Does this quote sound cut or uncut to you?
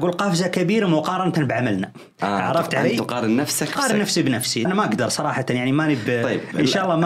cut